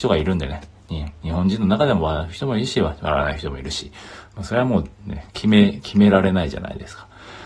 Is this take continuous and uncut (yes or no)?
no